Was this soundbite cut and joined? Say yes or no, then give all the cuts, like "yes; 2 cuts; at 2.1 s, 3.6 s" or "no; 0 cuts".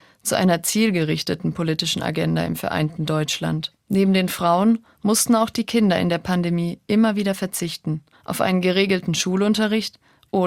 yes; 2 cuts; at 3.8 s, 8.1 s